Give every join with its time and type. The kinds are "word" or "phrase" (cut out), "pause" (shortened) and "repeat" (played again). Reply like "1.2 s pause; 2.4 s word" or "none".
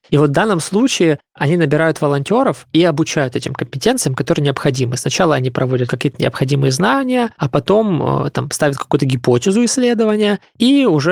5.9 s phrase; 7.3 s pause